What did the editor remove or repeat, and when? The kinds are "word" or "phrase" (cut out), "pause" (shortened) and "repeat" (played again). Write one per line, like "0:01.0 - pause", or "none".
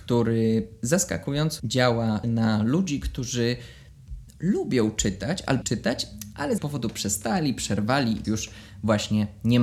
0:01.6 - word
0:02.2 - word
0:04.3 - pause
0:05.6 - word
0:06.6 - word
0:08.2 - word